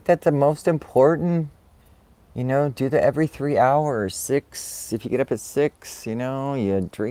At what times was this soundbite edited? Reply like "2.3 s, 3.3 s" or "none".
1.8 s